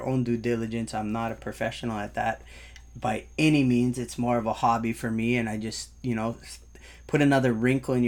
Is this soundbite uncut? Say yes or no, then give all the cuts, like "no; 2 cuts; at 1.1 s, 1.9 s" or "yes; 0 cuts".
yes; 0 cuts